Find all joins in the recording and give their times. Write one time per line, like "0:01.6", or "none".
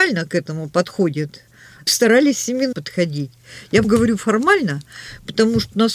0:01.9
0:02.7
0:03.8

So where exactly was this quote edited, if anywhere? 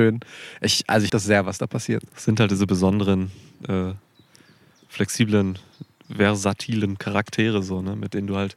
0:01.1

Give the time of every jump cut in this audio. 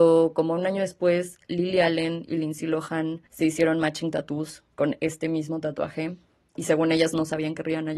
0:03.3

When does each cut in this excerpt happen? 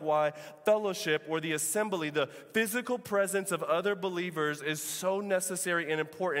none

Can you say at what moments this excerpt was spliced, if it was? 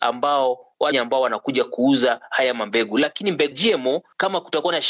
0:00.9
0:03.5

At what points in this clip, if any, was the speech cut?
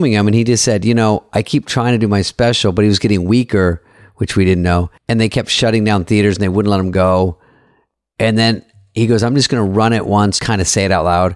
0:05.0
0:10.4

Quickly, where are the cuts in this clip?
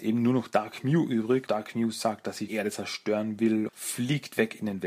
0:01.5
0:02.5
0:03.7

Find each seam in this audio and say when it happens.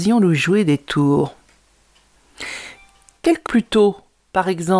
0:03.5

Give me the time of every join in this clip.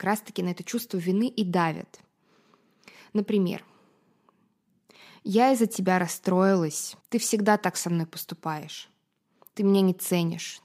0:07.0

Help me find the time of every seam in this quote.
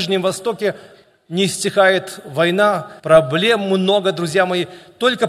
0:03.0

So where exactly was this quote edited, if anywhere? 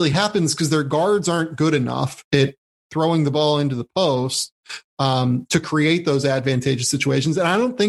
none

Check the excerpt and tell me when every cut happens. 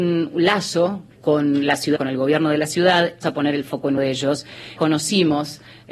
0:01.2
0:02.0
0:03.2
0:04.0
0:04.8

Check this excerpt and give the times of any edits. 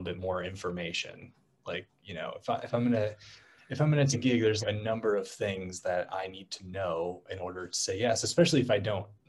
0:04.1
0:04.6

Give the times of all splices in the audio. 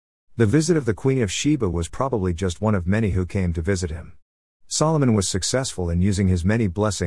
none

